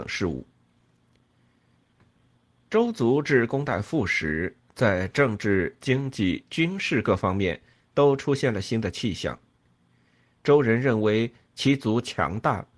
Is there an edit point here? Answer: no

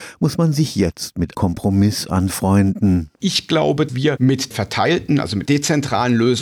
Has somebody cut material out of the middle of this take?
yes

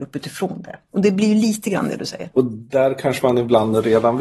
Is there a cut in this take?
no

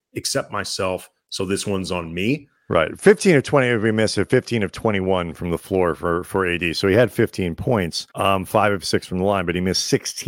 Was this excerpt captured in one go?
no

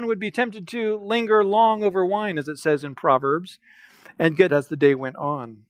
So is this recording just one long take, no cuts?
no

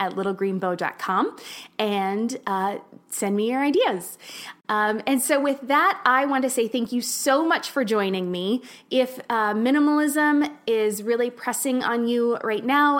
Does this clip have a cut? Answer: no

